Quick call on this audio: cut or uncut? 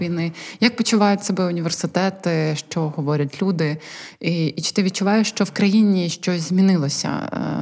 uncut